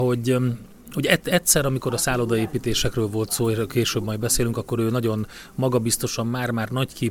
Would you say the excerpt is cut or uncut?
uncut